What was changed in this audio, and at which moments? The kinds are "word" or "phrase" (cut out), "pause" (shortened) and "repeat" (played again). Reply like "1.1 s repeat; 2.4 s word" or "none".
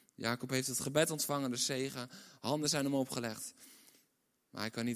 none